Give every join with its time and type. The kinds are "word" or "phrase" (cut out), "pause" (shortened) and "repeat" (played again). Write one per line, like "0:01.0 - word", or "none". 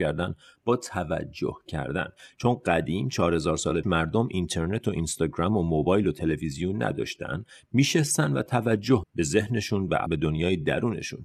0:03.8 - word
0:09.0 - word
0:10.1 - word